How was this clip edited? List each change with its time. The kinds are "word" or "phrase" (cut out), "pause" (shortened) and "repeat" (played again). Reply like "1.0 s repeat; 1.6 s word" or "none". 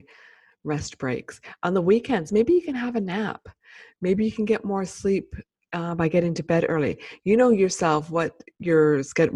none